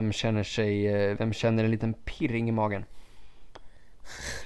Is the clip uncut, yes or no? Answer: yes